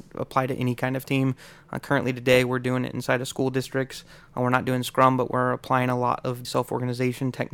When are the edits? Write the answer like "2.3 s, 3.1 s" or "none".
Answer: 6.4 s